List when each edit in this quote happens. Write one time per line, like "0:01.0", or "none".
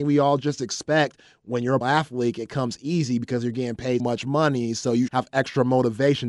0:01.8
0:04.0
0:05.1